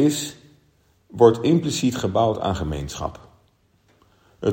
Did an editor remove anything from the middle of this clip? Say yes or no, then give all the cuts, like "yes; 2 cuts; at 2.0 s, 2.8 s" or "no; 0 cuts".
no; 0 cuts